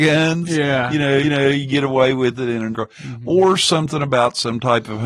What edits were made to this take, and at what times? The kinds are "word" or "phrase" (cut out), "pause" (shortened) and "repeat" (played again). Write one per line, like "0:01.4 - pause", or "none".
0:01.2 - repeat
0:02.7 - word